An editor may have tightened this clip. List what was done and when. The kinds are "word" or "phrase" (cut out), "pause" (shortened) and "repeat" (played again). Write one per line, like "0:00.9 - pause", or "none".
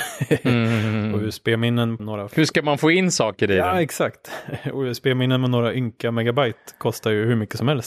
0:02.0 - word